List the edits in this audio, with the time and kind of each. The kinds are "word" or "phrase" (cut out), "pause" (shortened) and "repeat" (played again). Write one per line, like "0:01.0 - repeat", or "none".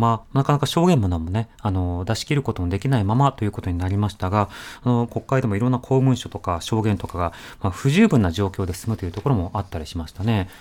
0:05.1 - phrase